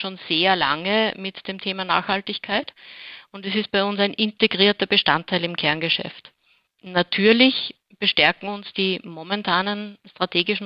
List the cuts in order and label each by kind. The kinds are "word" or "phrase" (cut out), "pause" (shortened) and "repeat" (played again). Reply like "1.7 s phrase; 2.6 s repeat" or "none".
none